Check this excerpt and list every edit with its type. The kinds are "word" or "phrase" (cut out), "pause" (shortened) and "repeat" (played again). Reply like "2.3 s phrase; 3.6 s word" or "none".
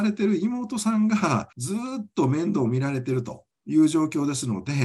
1.5 s pause